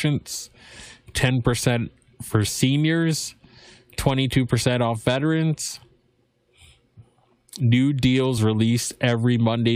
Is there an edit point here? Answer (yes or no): no